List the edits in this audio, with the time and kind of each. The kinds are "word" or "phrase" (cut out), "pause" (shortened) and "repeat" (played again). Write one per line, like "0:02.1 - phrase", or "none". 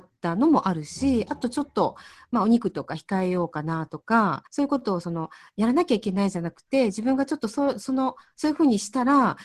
0:04.5 - pause